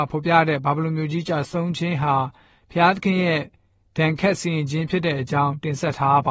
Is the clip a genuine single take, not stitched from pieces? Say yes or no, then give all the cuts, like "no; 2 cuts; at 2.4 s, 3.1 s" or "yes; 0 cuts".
yes; 0 cuts